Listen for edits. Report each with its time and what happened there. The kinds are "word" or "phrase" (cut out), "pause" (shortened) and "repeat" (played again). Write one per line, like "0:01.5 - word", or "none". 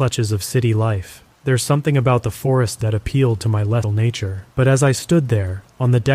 0:01.3 - pause
0:02.8 - word
0:03.8 - word
0:04.5 - pause